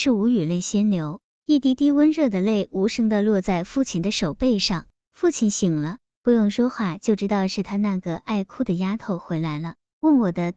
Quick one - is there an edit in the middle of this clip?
no; 0 cuts

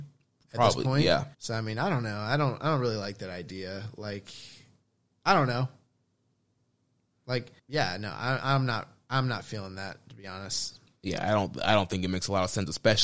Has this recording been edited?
yes; 2 cuts; at 1.3 s, 7.6 s

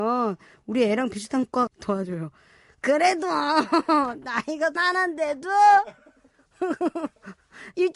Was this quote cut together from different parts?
yes; 2 cuts; at 1.7 s, 4.8 s

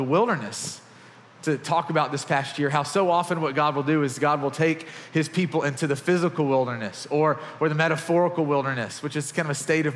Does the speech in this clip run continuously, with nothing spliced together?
yes; 0 cuts

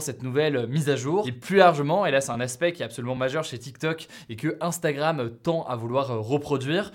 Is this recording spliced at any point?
no; 0 cuts

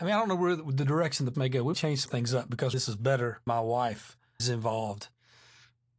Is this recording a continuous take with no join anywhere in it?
no; 6 cuts; at 1.3 s, 1.7 s, 2.1 s, 2.7 s, 3.5 s, 4.4 s

